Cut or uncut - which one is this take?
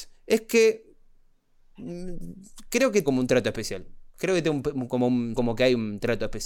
cut